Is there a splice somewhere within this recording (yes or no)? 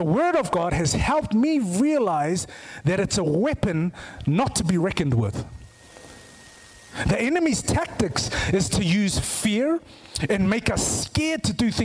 no